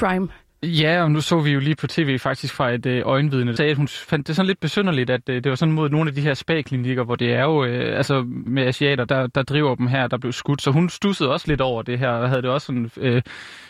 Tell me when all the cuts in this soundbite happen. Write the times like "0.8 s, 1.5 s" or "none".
1.8 s, 3.6 s, 8.5 s, 9.1 s